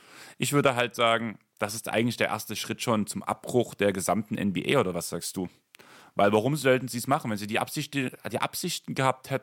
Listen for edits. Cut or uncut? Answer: uncut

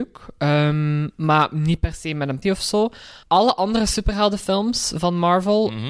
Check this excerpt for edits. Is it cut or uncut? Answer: cut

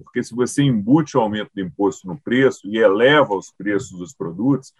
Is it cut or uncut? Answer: uncut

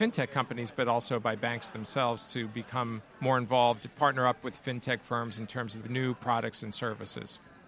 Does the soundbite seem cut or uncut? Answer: cut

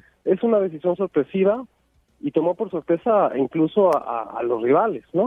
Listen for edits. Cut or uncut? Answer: uncut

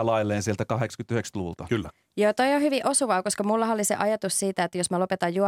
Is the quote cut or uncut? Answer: uncut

